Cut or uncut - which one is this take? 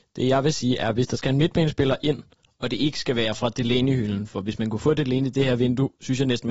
uncut